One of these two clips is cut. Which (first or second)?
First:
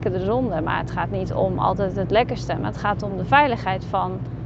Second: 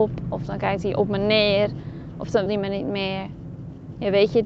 second